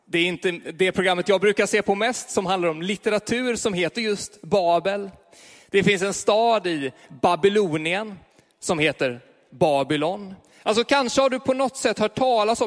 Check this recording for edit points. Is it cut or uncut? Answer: uncut